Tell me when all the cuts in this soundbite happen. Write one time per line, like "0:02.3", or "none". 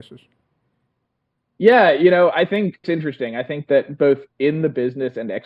0:02.8